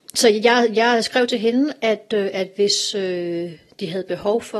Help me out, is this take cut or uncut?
uncut